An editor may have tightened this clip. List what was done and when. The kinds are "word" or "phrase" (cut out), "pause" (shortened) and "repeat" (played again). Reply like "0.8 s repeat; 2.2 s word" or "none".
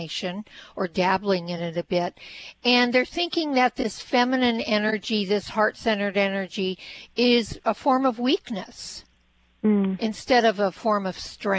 none